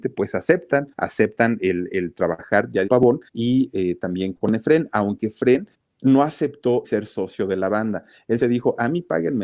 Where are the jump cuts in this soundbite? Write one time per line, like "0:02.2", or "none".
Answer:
0:00.9
0:02.9
0:03.3
0:04.3
0:05.7
0:06.8
0:08.4

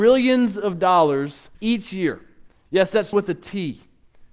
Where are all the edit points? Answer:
0:01.5
0:03.1

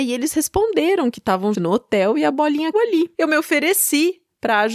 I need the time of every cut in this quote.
0:01.5
0:02.7

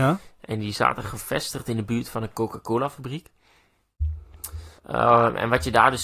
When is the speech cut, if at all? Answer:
0:04.8

